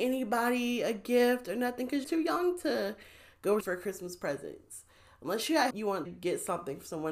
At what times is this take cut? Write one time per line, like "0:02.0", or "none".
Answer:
0:02.0
0:03.6
0:05.7
0:06.0